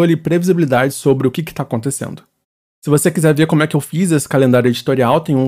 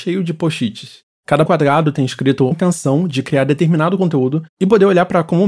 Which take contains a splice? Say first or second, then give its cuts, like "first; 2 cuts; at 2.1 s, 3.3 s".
second; 2 cuts; at 1.5 s, 2.5 s